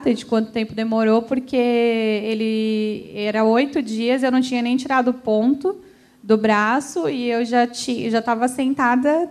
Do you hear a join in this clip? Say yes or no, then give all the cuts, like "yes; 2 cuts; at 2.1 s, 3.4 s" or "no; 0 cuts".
no; 0 cuts